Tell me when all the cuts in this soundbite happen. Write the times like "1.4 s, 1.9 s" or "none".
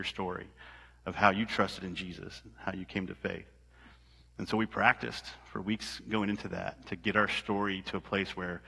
none